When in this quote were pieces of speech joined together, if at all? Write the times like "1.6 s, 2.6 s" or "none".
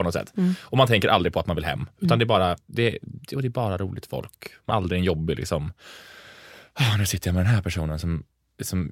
4.7 s